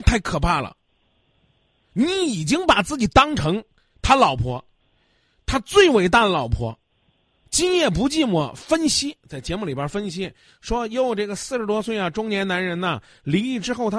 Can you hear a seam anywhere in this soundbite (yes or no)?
no